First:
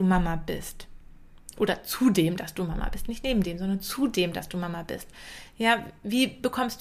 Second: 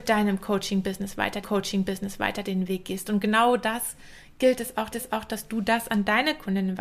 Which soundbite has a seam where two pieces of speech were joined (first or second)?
second